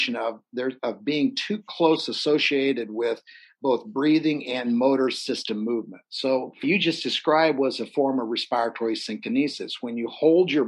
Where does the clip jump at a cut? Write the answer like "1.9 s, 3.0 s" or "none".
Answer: 6.6 s